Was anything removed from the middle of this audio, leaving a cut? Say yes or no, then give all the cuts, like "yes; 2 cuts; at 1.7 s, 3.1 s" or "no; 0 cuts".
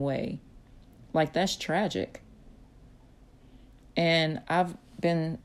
no; 0 cuts